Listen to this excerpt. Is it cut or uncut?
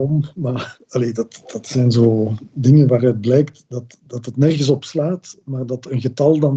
uncut